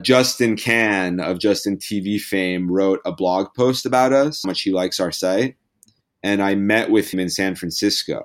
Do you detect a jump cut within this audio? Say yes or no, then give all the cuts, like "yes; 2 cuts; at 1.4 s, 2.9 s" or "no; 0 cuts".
yes; 3 cuts; at 4.4 s, 6.0 s, 7.1 s